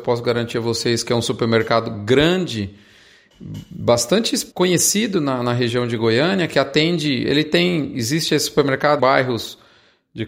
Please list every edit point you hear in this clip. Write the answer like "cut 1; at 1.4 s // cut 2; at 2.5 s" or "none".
cut 1; at 4.5 s // cut 2; at 9.0 s

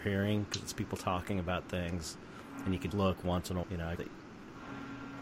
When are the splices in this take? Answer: cut 1; at 2.9 s // cut 2; at 3.6 s // cut 3; at 4.0 s

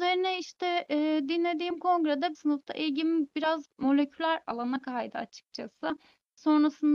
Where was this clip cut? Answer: cut 1; at 2.3 s

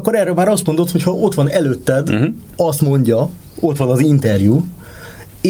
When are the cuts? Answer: none

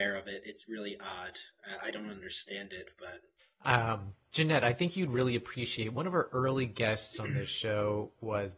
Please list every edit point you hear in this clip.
cut 1; at 3.4 s

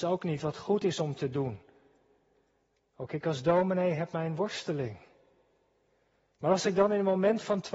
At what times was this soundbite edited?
none

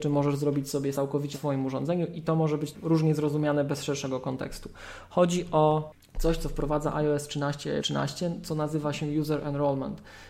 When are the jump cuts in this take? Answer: cut 1; at 0.9 s // cut 2; at 1.3 s // cut 3; at 2.7 s // cut 4; at 7.8 s

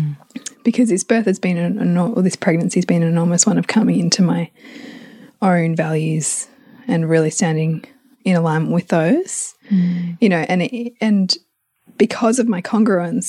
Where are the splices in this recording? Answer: none

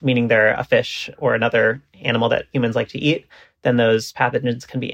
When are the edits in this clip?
none

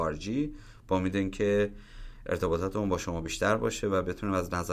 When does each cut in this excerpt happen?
none

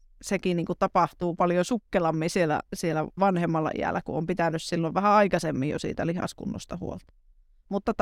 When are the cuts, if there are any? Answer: cut 1; at 3.2 s

